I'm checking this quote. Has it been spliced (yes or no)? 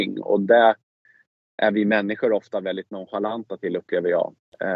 no